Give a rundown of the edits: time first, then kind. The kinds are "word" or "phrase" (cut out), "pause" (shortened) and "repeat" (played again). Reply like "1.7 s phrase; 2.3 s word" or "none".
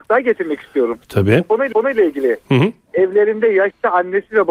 1.7 s repeat